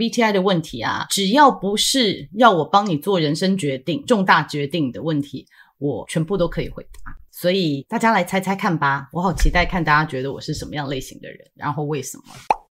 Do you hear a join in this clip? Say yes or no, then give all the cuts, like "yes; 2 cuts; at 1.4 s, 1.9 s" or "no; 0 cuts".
no; 0 cuts